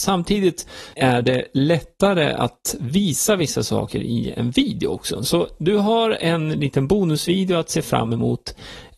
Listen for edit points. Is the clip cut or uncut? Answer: cut